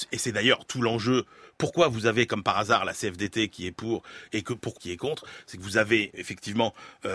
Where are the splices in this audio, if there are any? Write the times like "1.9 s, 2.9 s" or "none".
4.8 s